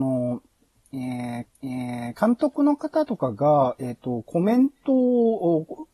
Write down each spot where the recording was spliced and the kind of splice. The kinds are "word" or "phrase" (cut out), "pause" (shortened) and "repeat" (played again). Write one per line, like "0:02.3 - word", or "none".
0:01.5 - repeat

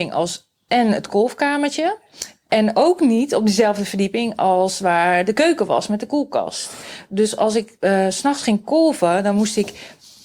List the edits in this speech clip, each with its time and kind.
none

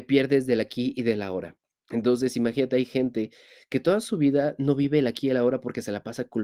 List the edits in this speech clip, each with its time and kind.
none

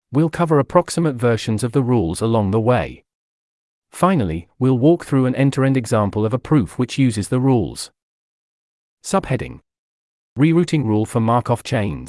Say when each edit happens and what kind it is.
none

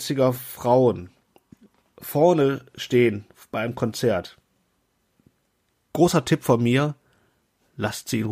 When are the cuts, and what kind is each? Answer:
none

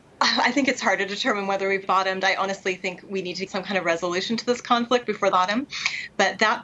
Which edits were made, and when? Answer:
0:01.8 - word
0:03.5 - word
0:05.3 - phrase

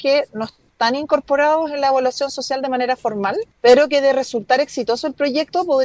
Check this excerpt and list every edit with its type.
0:03.5 - pause

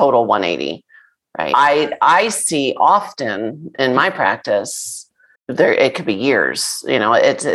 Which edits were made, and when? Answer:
0:05.4 - pause

